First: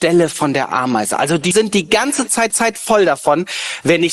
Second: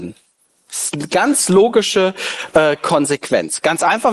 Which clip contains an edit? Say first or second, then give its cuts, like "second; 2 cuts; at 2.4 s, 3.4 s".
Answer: first; 2 cuts; at 1.5 s, 2.5 s